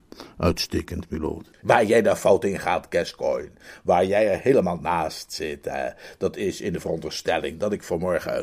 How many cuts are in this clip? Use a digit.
1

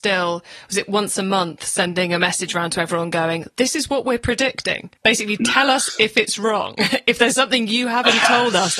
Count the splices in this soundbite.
1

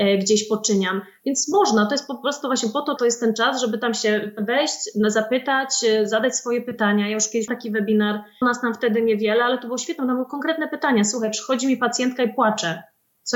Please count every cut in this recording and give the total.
3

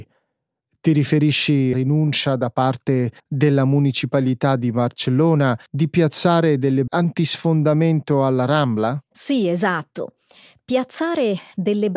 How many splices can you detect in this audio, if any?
4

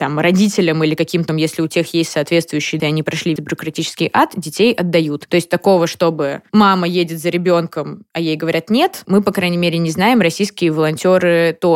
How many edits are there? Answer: 4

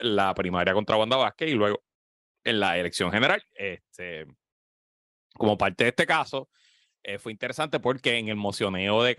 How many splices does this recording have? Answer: 0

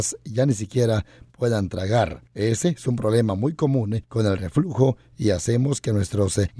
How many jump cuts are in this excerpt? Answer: 0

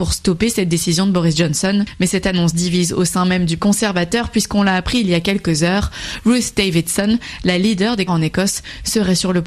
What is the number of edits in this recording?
2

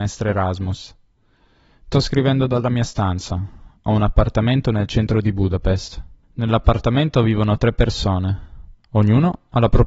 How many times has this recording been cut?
3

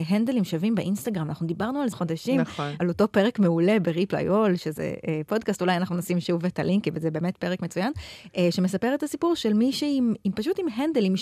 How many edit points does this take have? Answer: 1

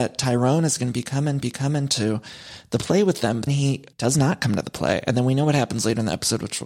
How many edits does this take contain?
3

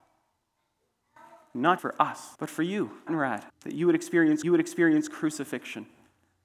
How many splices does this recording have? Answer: 5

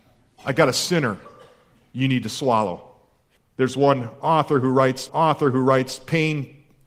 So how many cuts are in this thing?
2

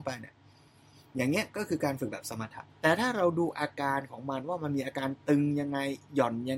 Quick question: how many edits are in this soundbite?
1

